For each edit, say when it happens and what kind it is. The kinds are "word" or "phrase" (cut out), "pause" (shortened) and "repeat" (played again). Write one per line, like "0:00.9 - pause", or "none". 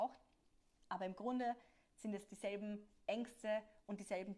none